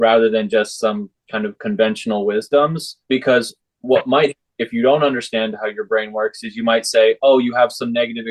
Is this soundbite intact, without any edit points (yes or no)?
no